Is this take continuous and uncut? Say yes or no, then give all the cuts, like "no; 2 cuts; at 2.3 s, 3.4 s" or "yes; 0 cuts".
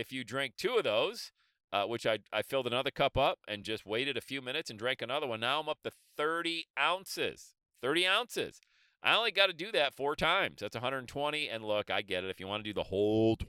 yes; 0 cuts